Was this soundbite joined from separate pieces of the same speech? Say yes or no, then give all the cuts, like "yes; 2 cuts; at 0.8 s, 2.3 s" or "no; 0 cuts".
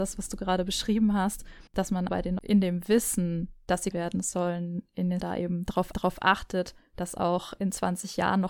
yes; 6 cuts; at 1.7 s, 2.1 s, 2.4 s, 3.9 s, 5.2 s, 5.9 s